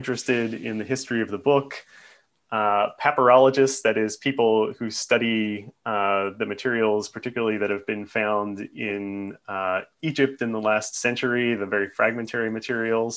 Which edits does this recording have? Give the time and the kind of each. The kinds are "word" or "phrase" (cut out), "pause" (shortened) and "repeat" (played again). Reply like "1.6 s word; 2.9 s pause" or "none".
none